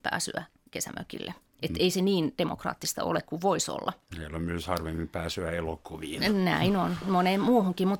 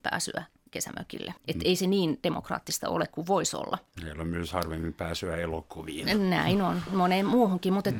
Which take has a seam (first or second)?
second